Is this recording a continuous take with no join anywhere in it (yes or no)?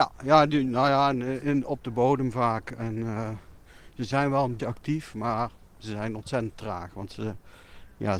no